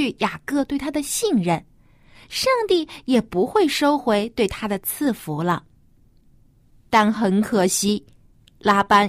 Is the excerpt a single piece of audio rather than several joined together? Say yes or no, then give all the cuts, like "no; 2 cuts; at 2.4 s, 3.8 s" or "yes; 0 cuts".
yes; 0 cuts